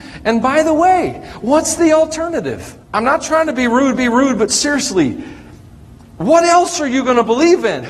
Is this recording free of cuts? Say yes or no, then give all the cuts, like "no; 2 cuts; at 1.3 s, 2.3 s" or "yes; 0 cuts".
no; 2 cuts; at 2.8 s, 4.0 s